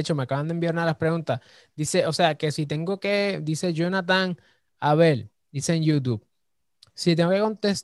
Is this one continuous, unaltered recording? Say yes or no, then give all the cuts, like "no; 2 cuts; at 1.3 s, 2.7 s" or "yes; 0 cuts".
yes; 0 cuts